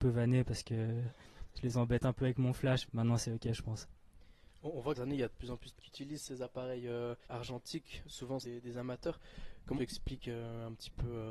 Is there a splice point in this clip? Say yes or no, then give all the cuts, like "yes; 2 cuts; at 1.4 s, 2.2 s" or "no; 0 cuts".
yes; 6 cuts; at 2.9 s, 4.9 s, 5.8 s, 7.2 s, 8.4 s, 9.8 s